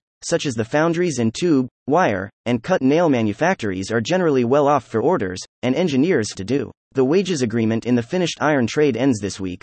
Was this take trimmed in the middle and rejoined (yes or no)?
yes